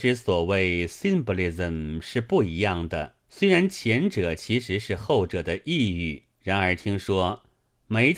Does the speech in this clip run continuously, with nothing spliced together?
no; 2 cuts; at 3.2 s, 6.3 s

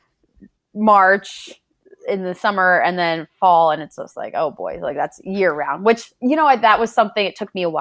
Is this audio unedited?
yes; 0 cuts

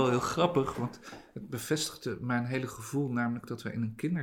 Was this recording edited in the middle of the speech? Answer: no; 0 cuts

